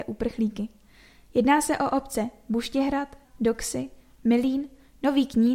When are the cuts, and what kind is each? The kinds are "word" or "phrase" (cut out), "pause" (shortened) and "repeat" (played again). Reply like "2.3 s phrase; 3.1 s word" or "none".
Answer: 3.2 s word

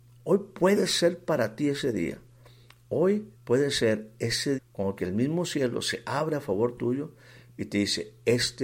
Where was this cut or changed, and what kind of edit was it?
3.3 s pause; 4.5 s word; 5.0 s phrase

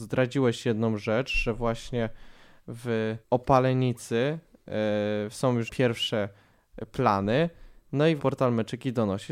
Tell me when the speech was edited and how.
3.2 s pause; 5.7 s word; 8.2 s word

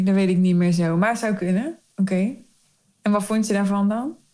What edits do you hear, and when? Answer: none

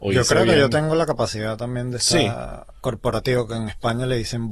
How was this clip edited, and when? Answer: none

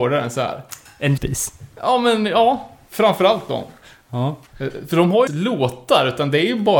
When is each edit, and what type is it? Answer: 1.2 s word; 4.5 s pause; 5.3 s phrase

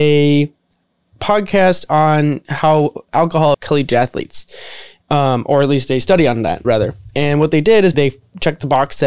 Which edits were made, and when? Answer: 3.5 s word; 6.6 s word; 7.9 s word

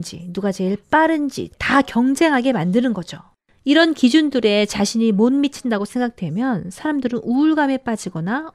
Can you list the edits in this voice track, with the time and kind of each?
1.5 s word

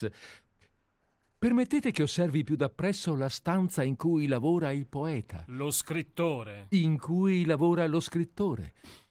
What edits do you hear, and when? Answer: none

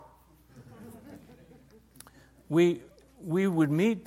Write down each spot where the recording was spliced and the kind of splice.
none

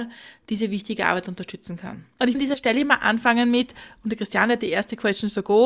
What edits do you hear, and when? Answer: 2.3 s word

